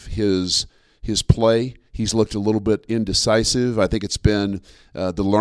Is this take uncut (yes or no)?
no